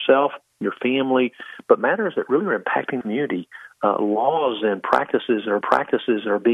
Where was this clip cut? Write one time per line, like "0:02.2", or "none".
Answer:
0:03.0
0:05.6

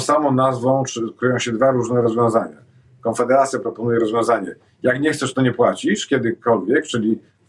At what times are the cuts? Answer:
none

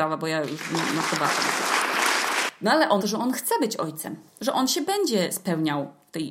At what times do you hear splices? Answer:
0:03.0

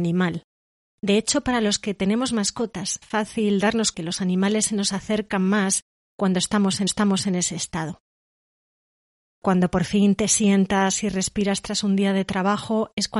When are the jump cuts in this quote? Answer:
0:03.0
0:03.9
0:06.9

